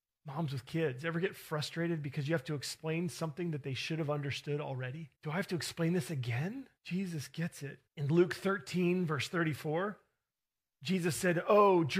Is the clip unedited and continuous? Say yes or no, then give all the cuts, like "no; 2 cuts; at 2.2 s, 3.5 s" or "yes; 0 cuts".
no; 3 cuts; at 5.1 s, 6.8 s, 7.9 s